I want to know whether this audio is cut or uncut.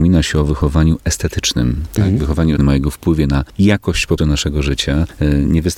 cut